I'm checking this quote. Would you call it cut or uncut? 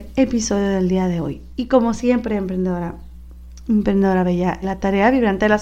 cut